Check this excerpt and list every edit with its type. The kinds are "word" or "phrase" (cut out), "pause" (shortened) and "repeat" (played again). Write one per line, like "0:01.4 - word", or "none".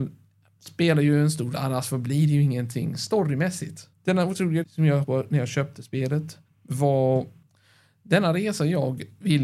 0:01.5 - word
0:03.9 - pause
0:04.6 - word
0:05.0 - word
0:06.5 - pause

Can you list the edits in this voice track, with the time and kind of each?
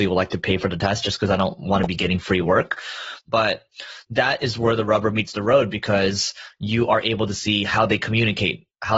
none

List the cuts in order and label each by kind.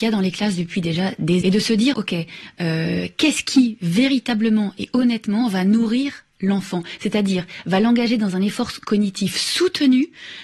0:01.4 - word
0:01.9 - word

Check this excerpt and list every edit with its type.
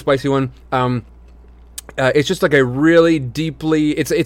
none

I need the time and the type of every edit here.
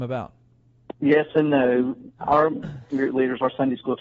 0:02.9 - word

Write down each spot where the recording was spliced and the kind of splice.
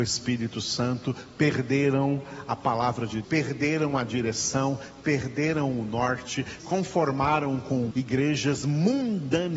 0:03.2 - word
0:06.6 - word
0:07.9 - word

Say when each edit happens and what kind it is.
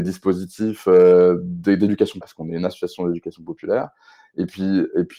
0:02.2 - word

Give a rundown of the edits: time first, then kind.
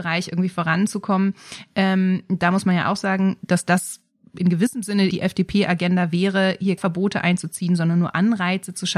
0:05.1 - word
0:06.8 - word

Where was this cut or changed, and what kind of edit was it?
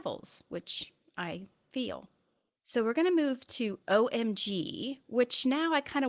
none

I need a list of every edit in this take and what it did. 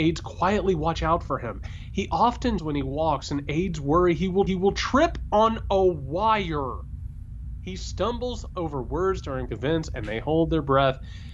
0:02.6 - word
0:04.5 - repeat
0:09.5 - word

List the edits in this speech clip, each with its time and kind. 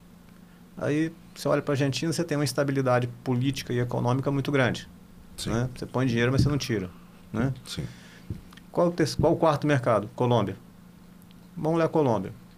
none

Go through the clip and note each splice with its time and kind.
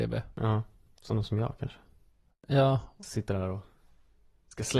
none

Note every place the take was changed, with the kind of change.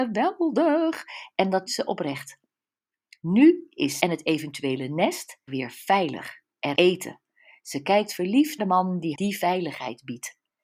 0:01.7 - word
0:04.0 - word
0:05.5 - word
0:06.7 - word
0:08.6 - word
0:09.1 - word

